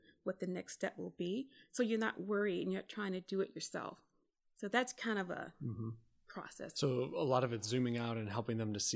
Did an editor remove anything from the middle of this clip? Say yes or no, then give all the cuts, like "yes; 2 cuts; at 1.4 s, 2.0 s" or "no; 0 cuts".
no; 0 cuts